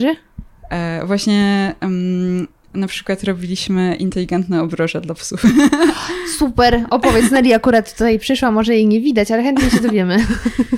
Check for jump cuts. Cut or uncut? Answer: uncut